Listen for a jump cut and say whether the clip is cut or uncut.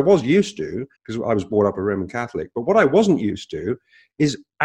cut